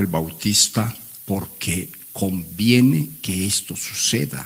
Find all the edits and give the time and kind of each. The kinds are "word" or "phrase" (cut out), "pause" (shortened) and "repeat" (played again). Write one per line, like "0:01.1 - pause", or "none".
0:01.2 - word